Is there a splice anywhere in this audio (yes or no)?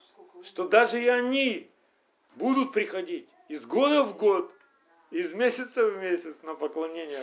no